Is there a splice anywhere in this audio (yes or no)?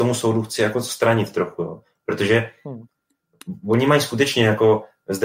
no